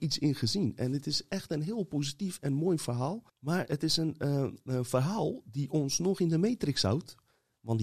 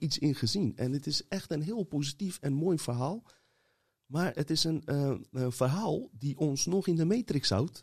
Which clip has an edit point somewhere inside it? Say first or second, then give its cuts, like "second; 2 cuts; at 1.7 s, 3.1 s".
first; 1 cut; at 3.3 s